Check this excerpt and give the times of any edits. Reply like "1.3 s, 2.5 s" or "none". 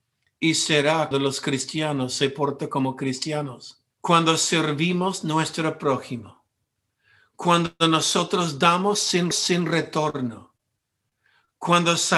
1.1 s, 3.9 s, 9.3 s